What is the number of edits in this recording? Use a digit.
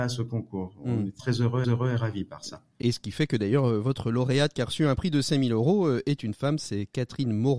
3